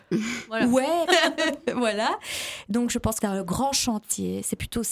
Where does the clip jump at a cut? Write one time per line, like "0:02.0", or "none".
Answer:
0:01.1
0:03.2